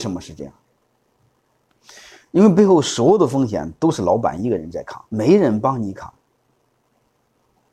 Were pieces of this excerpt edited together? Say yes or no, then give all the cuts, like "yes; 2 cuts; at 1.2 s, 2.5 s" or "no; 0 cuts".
yes; 1 cut; at 5.1 s